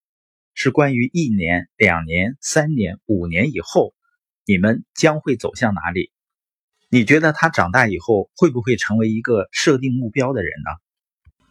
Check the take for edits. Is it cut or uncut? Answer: uncut